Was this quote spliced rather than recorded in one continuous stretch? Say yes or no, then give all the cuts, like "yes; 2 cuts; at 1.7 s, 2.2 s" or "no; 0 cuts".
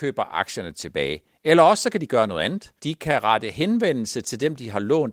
yes; 1 cut; at 2.8 s